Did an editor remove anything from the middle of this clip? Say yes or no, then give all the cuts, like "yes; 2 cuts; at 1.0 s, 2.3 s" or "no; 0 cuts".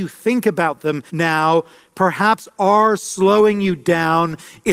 yes; 1 cut; at 1.1 s